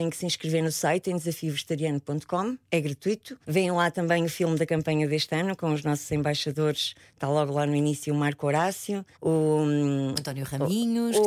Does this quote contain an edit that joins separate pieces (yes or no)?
yes